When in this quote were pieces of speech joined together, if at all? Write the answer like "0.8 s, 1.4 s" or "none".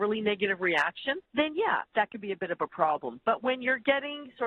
1.2 s, 1.9 s

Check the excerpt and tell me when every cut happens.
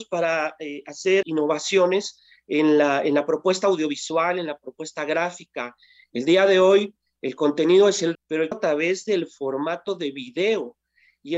1.2 s, 8.1 s, 8.5 s

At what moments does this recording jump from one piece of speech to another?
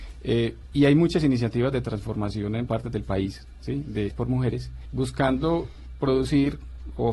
2.7 s, 4.1 s, 4.9 s

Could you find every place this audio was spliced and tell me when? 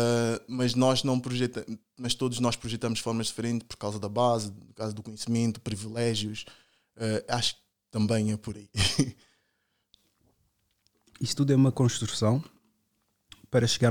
none

